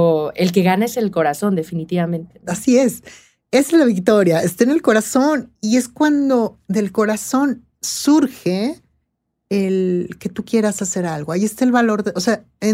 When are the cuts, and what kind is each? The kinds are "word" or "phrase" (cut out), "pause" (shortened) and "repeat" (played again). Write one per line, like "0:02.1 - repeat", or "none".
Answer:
0:05.6 - pause